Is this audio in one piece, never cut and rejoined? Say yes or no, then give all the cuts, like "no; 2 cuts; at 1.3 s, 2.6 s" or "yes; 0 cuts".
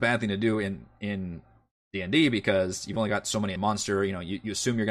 no; 1 cut; at 3.6 s